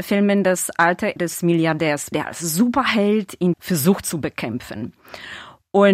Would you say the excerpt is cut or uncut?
cut